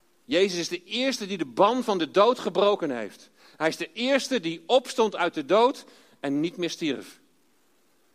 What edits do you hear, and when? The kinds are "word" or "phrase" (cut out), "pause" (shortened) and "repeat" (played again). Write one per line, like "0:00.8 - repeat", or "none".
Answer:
none